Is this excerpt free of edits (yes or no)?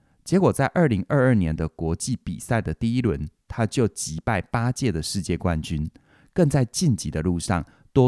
yes